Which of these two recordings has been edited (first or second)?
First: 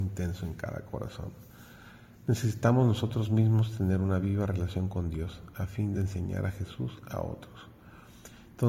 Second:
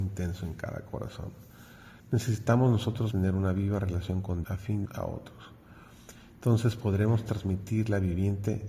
second